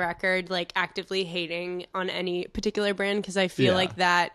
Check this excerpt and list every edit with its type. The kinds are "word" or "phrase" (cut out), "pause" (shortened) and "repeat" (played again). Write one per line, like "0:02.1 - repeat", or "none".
none

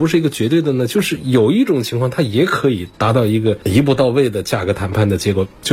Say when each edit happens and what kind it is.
0:02.9 - pause

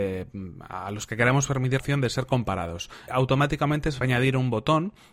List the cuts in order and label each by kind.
0:01.8 - word
0:03.1 - word
0:04.0 - phrase

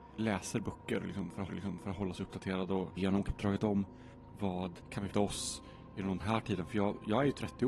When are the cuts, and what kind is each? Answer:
0:01.5 - repeat
0:03.0 - word
0:03.3 - phrase
0:04.8 - pause
0:05.1 - word
0:06.2 - phrase

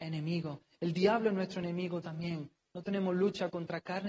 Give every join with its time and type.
none

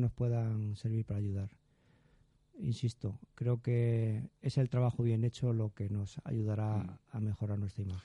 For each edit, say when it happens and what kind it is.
none

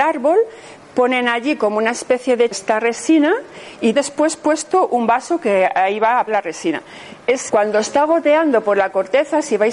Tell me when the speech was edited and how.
0:02.5 - phrase
0:03.9 - word
0:06.3 - word
0:07.5 - phrase

